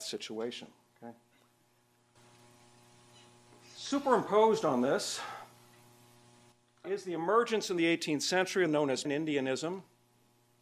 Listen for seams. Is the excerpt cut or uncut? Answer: cut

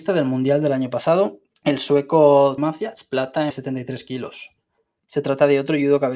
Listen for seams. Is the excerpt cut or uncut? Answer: cut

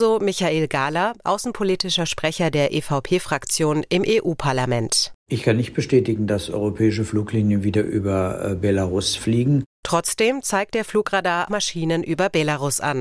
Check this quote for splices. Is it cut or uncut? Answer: cut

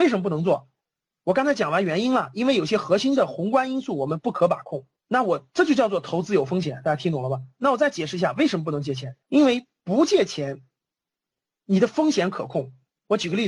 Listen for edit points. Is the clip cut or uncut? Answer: cut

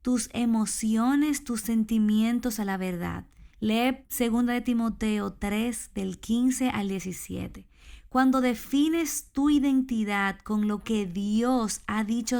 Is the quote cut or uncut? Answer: cut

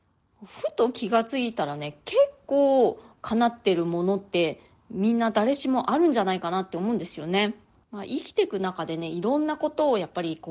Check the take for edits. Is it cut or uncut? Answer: uncut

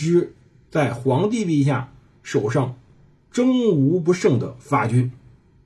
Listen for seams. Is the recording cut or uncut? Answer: uncut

